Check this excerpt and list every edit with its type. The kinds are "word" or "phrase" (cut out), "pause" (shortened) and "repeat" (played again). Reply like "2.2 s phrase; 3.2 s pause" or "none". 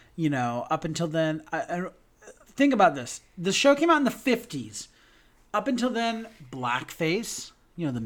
none